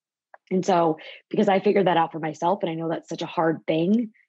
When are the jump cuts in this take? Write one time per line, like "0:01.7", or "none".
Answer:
none